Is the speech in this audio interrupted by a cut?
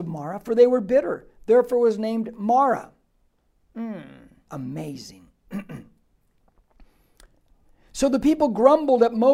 yes; 1 cut; at 4.5 s

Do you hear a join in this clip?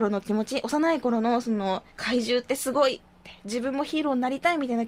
yes; 1 cut; at 1.9 s

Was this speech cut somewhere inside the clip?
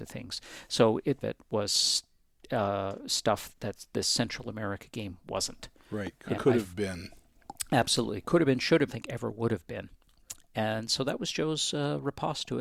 yes; 4 cuts; at 1.2 s, 3.5 s, 6.4 s, 8.9 s

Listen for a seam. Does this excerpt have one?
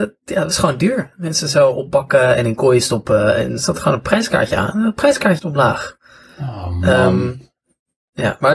yes; 2 cuts; at 3.6 s, 5.4 s

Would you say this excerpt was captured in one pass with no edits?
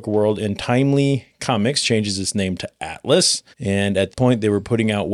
no; 2 cuts; at 3.5 s, 4.1 s

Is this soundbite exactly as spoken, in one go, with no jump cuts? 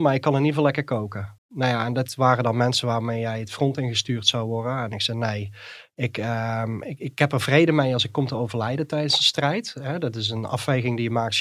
no; 1 cut; at 1.4 s

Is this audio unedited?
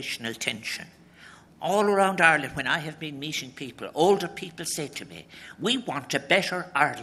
yes; 0 cuts

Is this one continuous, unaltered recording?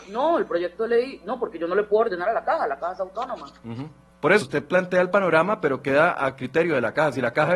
no; 2 cuts; at 4.1 s, 4.4 s

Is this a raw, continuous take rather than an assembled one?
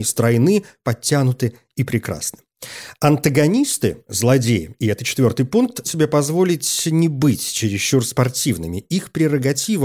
no; 1 cut; at 5.8 s

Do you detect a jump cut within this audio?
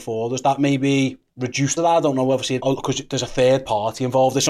yes; 3 cuts; at 1.3 s, 1.8 s, 2.6 s

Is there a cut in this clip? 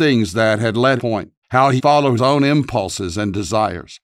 yes; 4 cuts; at 1.0 s, 1.4 s, 1.8 s, 2.2 s

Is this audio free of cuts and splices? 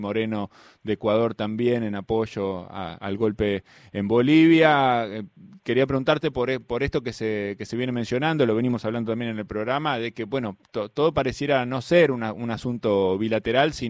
yes; 0 cuts

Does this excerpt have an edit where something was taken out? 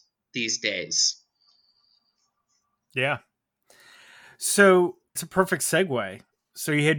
yes; 1 cut; at 5.2 s

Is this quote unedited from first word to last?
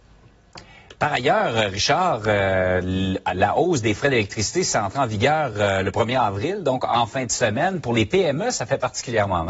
yes; 0 cuts

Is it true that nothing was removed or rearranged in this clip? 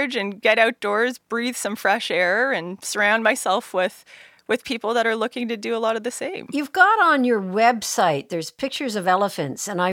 yes; 0 cuts

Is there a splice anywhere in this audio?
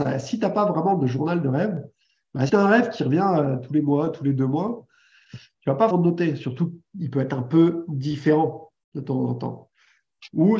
yes; 2 cuts; at 2.5 s, 5.9 s

